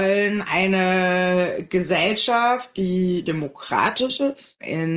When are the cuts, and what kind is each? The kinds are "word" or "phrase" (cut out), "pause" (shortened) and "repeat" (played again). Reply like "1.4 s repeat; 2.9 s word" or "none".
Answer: 3.2 s word